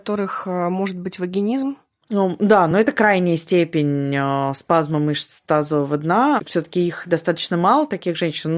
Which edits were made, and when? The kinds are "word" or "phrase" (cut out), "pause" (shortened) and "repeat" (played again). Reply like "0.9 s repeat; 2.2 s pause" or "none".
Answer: none